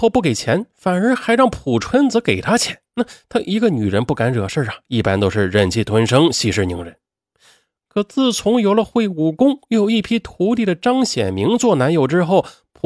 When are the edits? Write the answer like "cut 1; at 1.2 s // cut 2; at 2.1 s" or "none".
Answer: cut 1; at 2.9 s